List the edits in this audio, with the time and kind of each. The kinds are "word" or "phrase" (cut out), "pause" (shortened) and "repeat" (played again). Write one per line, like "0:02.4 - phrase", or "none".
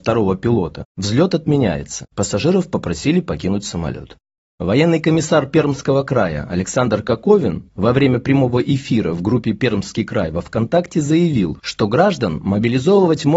none